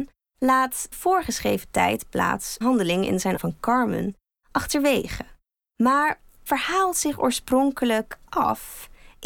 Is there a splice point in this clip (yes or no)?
yes